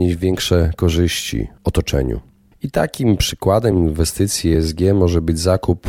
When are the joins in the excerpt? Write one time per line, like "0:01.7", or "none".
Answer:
none

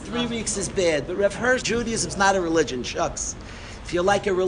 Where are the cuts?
0:01.6

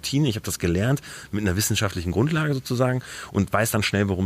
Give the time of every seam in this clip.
none

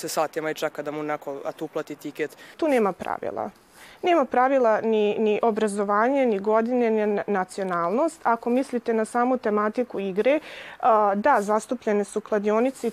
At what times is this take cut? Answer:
none

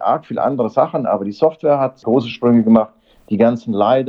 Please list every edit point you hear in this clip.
none

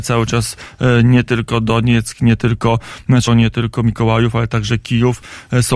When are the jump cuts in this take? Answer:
0:03.3

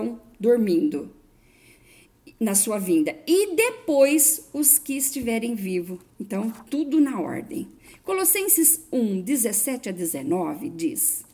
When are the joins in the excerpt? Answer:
0:06.1

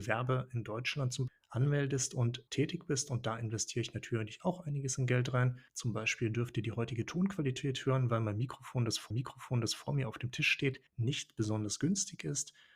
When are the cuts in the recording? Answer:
0:01.3
0:02.5
0:05.7
0:09.1
0:10.9

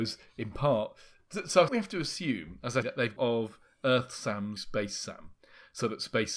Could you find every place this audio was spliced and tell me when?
0:01.7
0:02.8
0:03.2
0:04.6

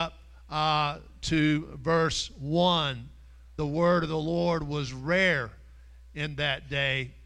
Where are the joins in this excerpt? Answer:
0:03.6

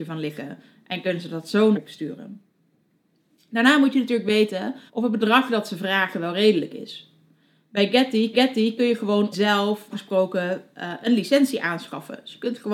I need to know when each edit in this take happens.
0:01.7
0:04.9
0:08.3
0:09.3
0:09.9

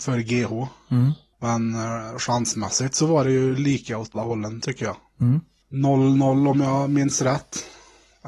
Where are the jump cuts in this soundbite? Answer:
0:04.1

